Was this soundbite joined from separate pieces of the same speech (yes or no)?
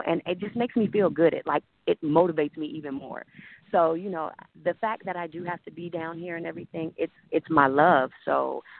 no